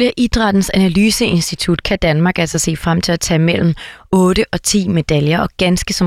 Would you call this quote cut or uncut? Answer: uncut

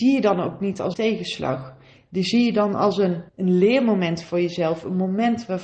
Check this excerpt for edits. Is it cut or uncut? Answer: cut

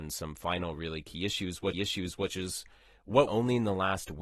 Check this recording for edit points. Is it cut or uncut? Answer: cut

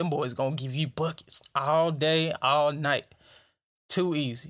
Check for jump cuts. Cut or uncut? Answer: uncut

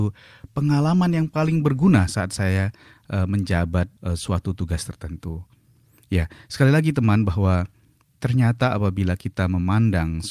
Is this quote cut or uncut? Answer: uncut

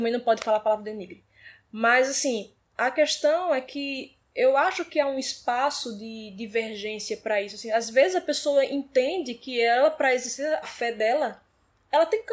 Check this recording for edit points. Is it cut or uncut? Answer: cut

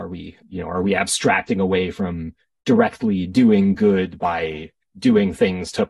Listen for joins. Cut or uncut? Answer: uncut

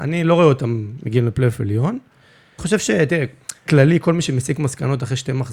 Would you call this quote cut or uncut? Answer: cut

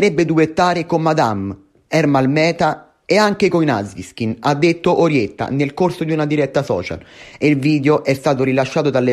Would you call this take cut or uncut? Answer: uncut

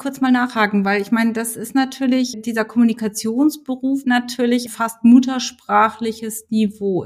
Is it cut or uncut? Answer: cut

